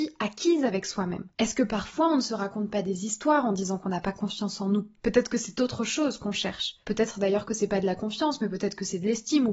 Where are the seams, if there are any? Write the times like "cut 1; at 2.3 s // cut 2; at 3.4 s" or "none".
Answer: cut 1; at 1.3 s // cut 2; at 5.0 s // cut 3; at 6.8 s